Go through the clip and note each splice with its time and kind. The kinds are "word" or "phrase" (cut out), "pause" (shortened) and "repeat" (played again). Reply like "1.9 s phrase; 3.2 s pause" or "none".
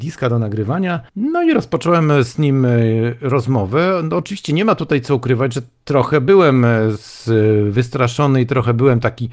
1.1 s pause